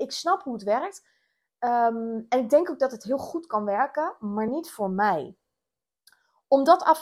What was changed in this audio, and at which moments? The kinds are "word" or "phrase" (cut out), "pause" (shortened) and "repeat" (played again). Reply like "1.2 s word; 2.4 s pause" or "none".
none